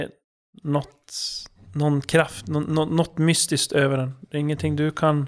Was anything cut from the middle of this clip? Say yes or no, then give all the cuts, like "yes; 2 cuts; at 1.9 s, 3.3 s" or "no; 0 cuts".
no; 0 cuts